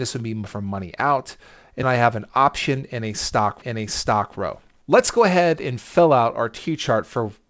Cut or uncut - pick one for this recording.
cut